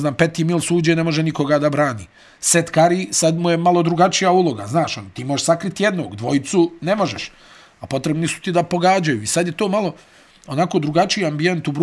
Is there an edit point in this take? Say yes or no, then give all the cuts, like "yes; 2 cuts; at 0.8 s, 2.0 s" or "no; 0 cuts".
no; 0 cuts